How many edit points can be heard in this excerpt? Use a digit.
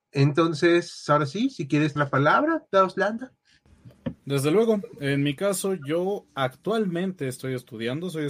2